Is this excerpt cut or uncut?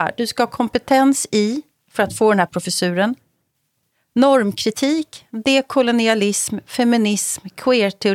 uncut